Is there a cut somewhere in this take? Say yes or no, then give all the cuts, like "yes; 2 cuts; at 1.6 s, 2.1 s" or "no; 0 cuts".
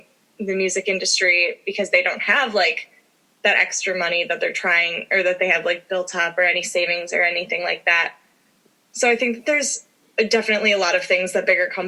no; 0 cuts